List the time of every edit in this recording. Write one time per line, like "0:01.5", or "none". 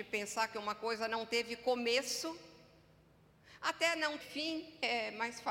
0:04.2